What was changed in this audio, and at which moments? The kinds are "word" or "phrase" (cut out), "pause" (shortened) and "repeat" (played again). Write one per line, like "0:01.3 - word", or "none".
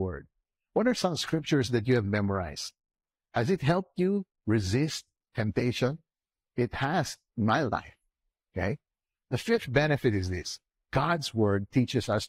none